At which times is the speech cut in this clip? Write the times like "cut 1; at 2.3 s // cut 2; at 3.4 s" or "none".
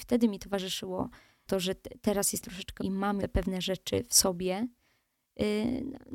cut 1; at 1.5 s // cut 2; at 2.4 s // cut 3; at 2.8 s // cut 4; at 3.2 s